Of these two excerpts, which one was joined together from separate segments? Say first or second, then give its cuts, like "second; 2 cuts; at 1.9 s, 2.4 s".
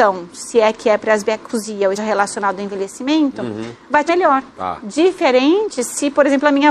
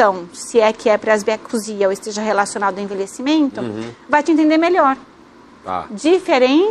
first; 3 cuts; at 2.0 s, 4.1 s, 4.5 s